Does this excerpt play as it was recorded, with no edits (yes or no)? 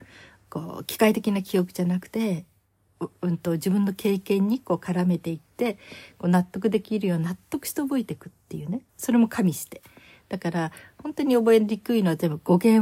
no